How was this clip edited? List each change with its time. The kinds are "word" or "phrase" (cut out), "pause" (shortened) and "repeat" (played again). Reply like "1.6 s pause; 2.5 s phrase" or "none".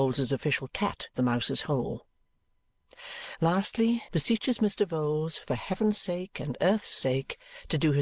1.1 s word; 4.1 s phrase